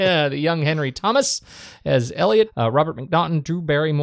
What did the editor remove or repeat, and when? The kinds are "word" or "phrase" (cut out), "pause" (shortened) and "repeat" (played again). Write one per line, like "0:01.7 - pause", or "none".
none